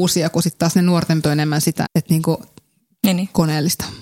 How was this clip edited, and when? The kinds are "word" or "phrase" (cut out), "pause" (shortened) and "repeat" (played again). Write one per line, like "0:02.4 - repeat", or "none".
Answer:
0:01.2 - word
0:01.8 - word